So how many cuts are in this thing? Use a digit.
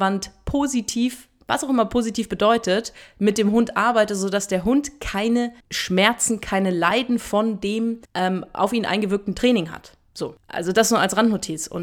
2